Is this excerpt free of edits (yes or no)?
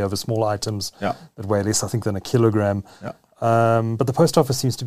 yes